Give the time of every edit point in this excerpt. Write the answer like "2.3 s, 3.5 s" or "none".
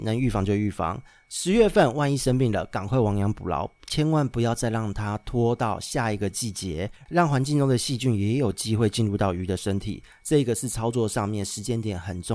none